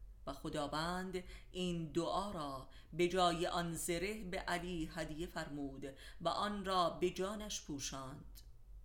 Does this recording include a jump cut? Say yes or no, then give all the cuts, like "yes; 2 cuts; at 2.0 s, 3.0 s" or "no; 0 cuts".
no; 0 cuts